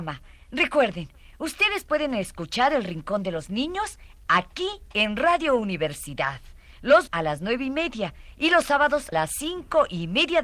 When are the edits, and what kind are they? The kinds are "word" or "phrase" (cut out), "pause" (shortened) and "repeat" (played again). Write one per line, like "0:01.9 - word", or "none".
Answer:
0:07.1 - word
0:09.1 - word